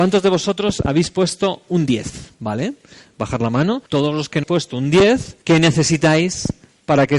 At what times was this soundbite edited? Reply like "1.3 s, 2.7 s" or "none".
2.3 s, 3.9 s, 4.4 s, 5.4 s